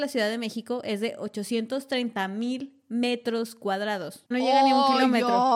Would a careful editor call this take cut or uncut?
cut